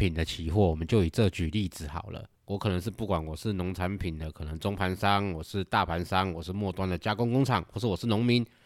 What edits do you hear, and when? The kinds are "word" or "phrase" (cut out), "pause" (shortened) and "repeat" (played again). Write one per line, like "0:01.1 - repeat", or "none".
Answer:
0:02.3 - pause

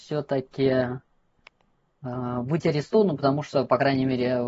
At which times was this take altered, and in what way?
none

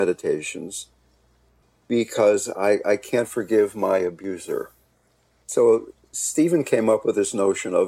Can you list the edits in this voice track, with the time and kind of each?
none

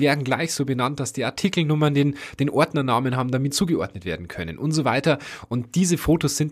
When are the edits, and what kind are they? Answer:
0:03.5 - phrase

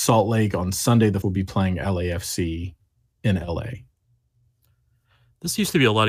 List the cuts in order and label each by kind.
0:01.2 - word

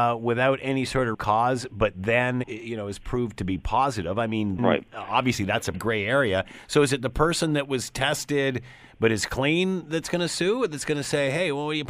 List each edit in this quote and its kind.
0:01.1 - word
0:02.4 - word
0:04.6 - word
0:05.7 - word

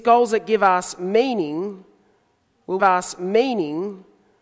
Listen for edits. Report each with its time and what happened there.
0:02.8 - repeat

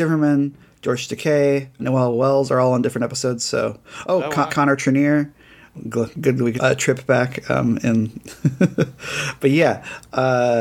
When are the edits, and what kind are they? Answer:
0:01.8 - word
0:04.5 - word
0:05.7 - word
0:06.6 - word

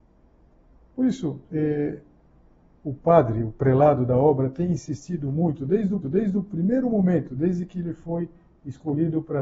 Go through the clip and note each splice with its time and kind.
0:01.5 - pause
0:06.0 - repeat

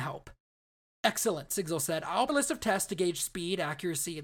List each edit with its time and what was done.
0:02.3 - word

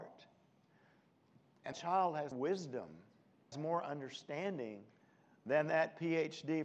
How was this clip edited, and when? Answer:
0:01.7 - word
0:02.3 - word
0:03.5 - word

